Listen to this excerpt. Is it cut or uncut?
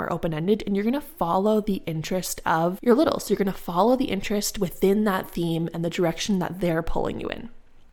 uncut